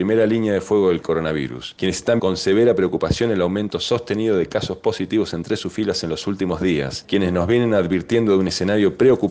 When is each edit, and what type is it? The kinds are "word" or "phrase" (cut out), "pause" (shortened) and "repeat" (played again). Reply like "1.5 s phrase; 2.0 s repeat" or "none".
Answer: 2.2 s word